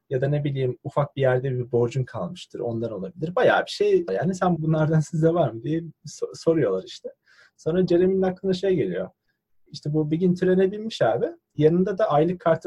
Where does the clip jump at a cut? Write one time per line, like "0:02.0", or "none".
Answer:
0:04.1
0:04.6